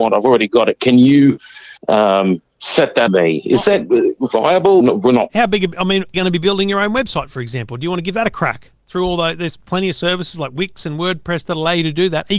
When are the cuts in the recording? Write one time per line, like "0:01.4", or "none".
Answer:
0:01.8
0:03.1
0:04.8
0:05.3
0:06.1